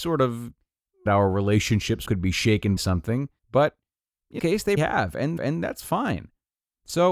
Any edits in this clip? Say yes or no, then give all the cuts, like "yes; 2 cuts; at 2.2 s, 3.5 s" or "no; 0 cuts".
yes; 7 cuts; at 1.1 s, 2.1 s, 2.8 s, 3.4 s, 4.4 s, 4.8 s, 5.4 s